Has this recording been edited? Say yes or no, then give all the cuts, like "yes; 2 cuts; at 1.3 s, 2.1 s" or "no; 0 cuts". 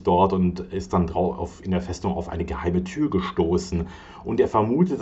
no; 0 cuts